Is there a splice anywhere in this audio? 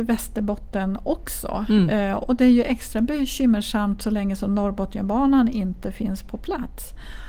no; 0 cuts

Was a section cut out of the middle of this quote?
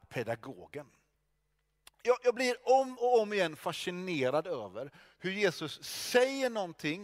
no; 0 cuts

